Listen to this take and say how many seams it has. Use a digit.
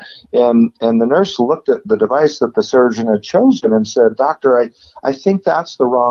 0